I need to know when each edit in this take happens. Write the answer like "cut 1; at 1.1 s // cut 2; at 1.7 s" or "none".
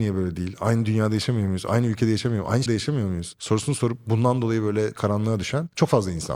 cut 1; at 2.7 s // cut 2; at 4.9 s